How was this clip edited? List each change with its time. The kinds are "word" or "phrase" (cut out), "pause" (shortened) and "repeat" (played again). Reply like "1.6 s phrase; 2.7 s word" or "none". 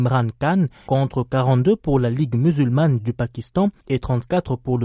none